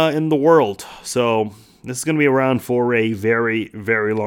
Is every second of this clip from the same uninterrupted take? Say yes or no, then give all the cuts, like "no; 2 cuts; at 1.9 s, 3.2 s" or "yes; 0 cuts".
yes; 0 cuts